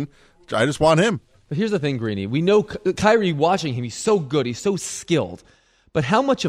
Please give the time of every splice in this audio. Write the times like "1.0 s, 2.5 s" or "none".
none